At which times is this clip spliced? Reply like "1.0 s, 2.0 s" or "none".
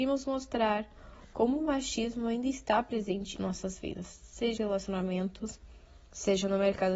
3.4 s, 4.6 s